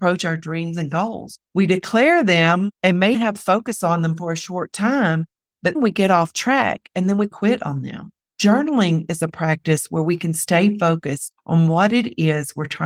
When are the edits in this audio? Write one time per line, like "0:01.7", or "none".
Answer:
0:01.4
0:02.7
0:03.1
0:05.7
0:07.3
0:08.2
0:11.4